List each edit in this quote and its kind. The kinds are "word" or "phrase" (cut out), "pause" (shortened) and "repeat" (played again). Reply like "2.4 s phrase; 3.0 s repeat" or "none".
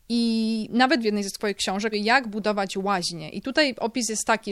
1.0 s word; 1.9 s word